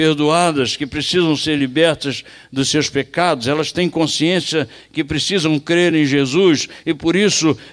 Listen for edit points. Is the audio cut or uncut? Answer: uncut